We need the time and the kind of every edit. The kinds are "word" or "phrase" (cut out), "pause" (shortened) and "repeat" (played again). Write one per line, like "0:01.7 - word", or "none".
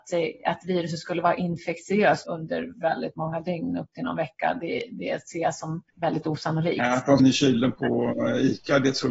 0:02.2 - word
0:05.9 - pause
0:07.2 - phrase